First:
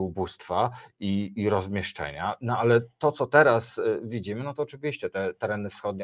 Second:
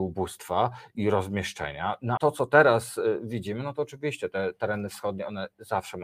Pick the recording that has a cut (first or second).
second